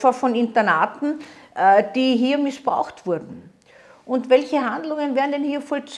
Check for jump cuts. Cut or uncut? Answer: uncut